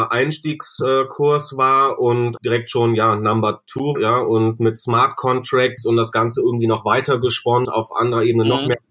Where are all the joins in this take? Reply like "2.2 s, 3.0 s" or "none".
2.4 s, 3.9 s, 7.6 s